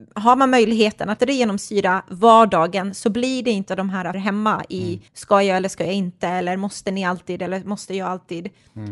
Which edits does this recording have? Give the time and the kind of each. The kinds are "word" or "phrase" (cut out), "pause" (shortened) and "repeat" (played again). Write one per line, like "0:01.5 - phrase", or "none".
0:01.2 - word
0:04.1 - phrase
0:05.1 - pause